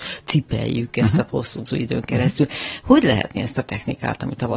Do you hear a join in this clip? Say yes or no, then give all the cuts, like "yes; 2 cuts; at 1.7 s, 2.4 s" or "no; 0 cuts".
yes; 3 cuts; at 1.3 s, 1.7 s, 3.4 s